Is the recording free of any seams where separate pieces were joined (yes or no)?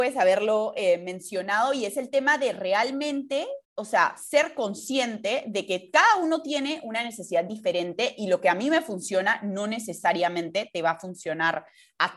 no